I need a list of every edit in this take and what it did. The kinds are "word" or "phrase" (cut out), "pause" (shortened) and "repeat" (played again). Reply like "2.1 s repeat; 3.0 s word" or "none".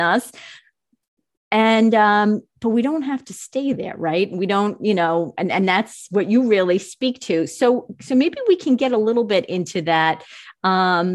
none